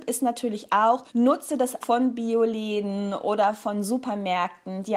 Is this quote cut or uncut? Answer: cut